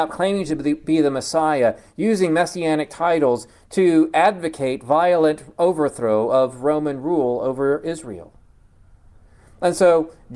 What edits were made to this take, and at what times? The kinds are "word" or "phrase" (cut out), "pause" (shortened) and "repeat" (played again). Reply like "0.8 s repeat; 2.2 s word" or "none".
none